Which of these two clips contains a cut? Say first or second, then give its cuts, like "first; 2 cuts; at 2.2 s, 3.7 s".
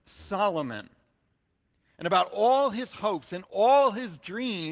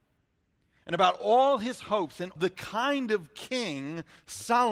second; 1 cut; at 2.4 s